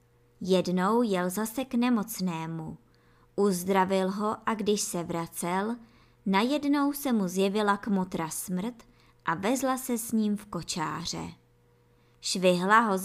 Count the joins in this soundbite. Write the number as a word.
zero